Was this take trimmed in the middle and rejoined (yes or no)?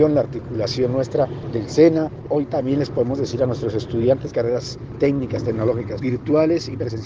yes